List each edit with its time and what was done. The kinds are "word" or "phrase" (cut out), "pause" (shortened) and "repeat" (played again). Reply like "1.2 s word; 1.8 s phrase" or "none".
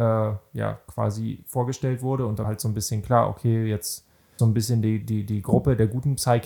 2.4 s word; 4.4 s word; 5.0 s word